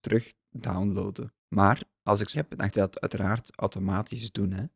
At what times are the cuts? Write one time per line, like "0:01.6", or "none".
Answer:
0:01.4
0:02.3
0:02.7